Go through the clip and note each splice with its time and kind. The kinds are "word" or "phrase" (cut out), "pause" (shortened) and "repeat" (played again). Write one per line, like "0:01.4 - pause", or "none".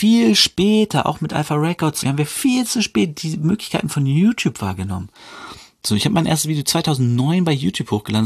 0:02.0 - word